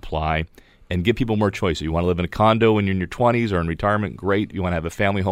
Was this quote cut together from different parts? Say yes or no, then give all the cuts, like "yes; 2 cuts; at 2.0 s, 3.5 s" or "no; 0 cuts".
no; 0 cuts